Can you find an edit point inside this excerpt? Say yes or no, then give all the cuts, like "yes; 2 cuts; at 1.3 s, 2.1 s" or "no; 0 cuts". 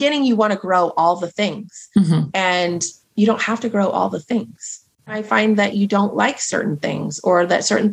no; 0 cuts